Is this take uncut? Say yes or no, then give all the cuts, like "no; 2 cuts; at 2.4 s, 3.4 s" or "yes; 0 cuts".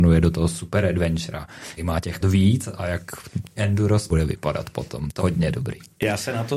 no; 5 cuts; at 1.8 s, 2.2 s, 3.6 s, 4.1 s, 5.2 s